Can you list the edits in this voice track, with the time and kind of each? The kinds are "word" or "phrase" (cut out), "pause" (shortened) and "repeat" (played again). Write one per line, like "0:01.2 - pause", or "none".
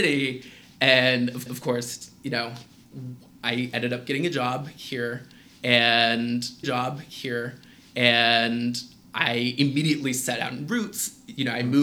0:01.5 - repeat
0:06.6 - repeat